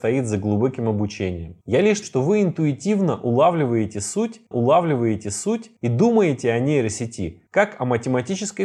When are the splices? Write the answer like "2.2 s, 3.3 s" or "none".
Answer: 2.0 s, 4.5 s

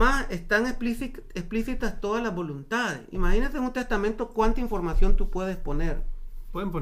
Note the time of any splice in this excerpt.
none

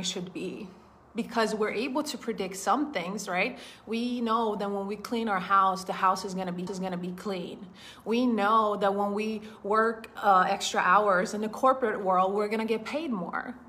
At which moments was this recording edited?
6.7 s

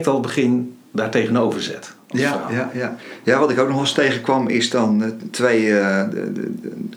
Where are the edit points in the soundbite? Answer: none

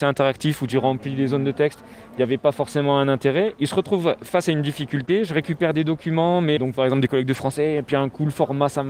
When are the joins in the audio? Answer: 6.6 s

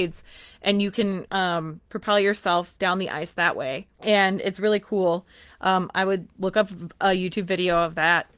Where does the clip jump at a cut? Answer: 3.9 s

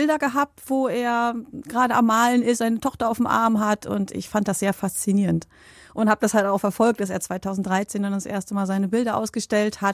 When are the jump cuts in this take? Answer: none

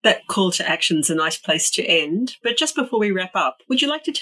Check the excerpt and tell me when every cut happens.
none

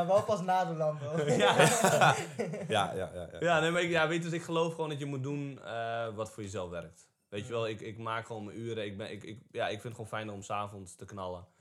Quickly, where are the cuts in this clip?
none

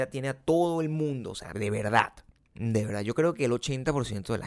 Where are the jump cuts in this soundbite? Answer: 1.5 s

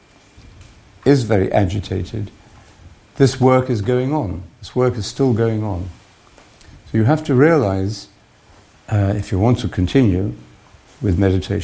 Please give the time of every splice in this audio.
none

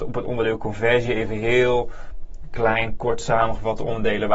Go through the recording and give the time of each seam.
none

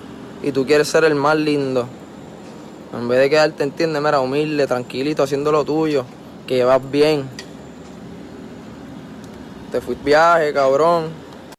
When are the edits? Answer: 10.0 s

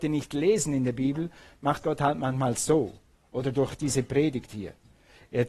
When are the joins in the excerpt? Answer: 1.8 s

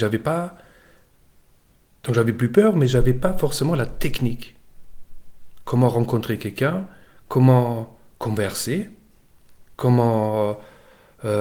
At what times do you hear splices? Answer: none

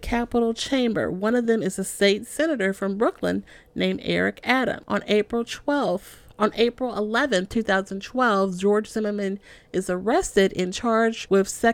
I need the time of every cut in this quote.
none

